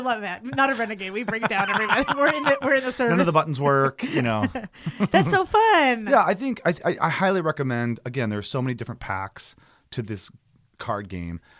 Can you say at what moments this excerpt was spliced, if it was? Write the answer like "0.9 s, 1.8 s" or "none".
none